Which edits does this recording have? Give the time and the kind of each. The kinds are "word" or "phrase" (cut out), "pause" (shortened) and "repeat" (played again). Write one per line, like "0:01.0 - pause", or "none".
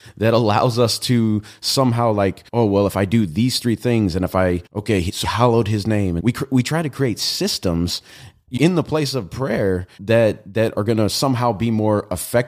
0:02.5 - pause
0:04.7 - pause
0:05.2 - word
0:06.2 - word
0:08.6 - word
0:10.0 - word
0:10.7 - word